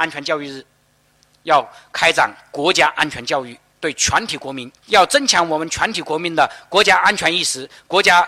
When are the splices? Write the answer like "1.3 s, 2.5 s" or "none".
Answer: 4.8 s